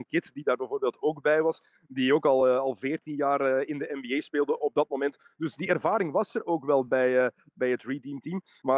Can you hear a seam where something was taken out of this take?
no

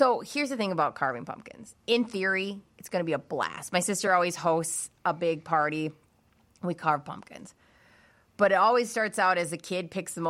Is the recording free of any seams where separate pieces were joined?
yes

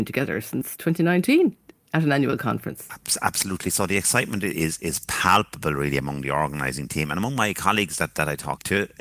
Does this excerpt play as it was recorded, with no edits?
yes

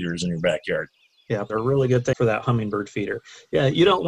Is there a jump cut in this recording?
yes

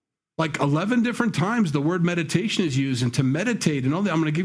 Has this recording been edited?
no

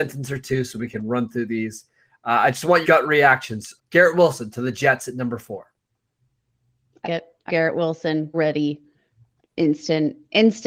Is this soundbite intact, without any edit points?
no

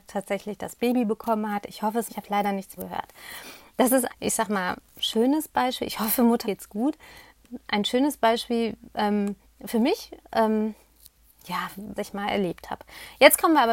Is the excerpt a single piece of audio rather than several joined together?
no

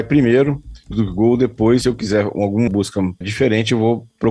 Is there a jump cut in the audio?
yes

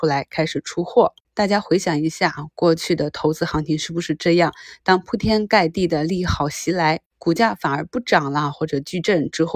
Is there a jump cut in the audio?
yes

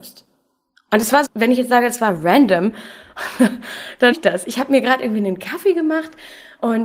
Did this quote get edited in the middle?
yes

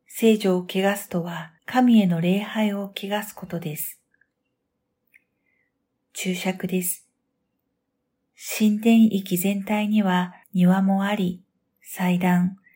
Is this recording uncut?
no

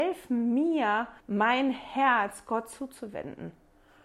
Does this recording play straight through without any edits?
no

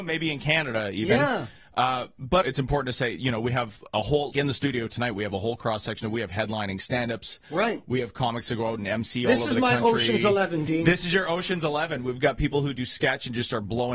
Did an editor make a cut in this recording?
yes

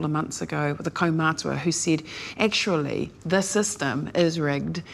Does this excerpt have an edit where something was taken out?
no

